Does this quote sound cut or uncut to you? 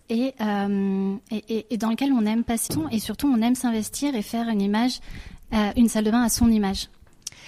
cut